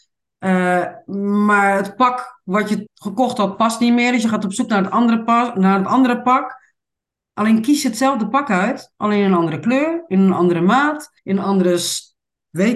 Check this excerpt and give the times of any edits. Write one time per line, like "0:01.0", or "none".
0:02.9
0:11.2